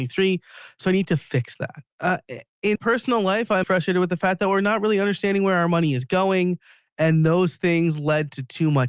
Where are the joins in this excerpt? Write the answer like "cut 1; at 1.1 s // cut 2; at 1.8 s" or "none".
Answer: cut 1; at 1.9 s // cut 2; at 2.8 s // cut 3; at 3.6 s